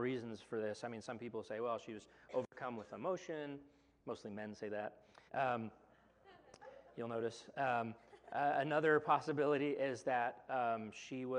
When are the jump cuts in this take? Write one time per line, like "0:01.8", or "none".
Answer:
0:05.3